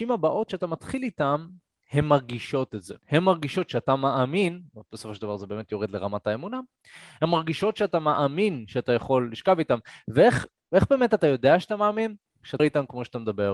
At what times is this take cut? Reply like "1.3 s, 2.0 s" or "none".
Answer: 3.0 s, 12.6 s